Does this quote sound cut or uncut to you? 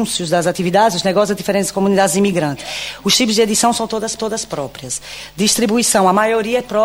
cut